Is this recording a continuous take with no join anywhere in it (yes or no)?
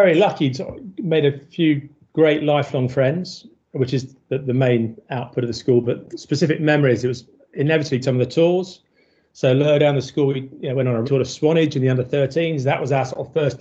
no